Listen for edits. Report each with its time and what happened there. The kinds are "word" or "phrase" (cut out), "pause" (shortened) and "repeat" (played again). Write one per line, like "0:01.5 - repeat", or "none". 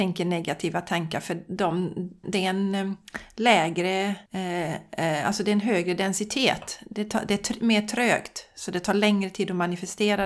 0:02.2 - word
0:04.3 - pause